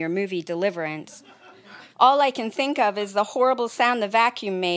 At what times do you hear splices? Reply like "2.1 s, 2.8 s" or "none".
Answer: 1.9 s